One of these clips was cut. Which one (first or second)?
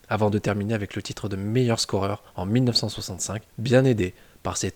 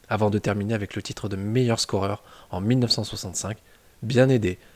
first